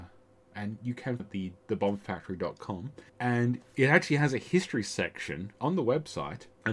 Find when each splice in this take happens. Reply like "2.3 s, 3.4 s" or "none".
1.2 s, 3.1 s, 5.6 s